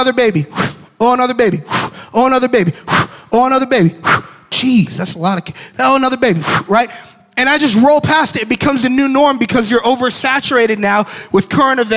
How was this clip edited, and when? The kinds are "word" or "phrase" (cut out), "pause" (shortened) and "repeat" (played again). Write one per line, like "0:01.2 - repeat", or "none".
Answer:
none